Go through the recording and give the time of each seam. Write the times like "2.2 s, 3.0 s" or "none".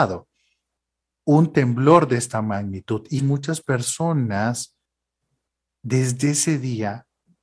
3.2 s